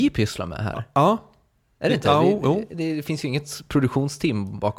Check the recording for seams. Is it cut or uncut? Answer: uncut